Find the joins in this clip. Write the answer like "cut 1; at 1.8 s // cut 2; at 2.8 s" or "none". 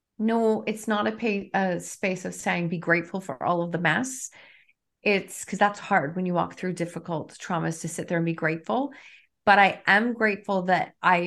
none